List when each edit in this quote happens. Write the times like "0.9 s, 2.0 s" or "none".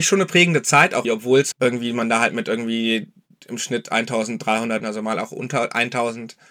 1.0 s, 1.5 s, 4.8 s